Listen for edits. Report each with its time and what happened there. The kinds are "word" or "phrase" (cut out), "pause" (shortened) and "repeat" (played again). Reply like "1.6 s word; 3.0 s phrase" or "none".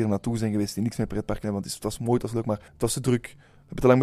2.7 s pause